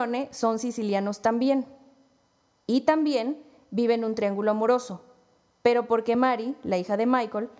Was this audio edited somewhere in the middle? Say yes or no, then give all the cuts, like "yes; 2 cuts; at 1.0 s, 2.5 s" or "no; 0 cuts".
no; 0 cuts